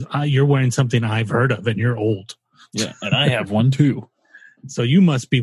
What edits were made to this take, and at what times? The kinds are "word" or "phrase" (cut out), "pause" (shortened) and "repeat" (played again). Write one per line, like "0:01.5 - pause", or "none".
none